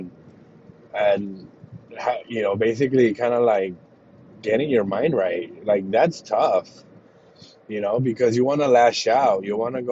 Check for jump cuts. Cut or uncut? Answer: uncut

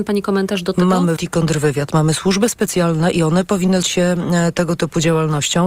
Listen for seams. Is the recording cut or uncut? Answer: cut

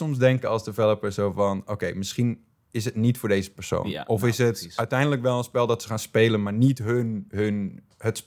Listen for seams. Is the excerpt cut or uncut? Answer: uncut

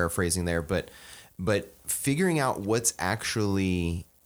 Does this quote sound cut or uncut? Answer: uncut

